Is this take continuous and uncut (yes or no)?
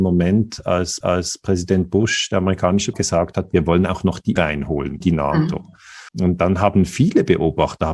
no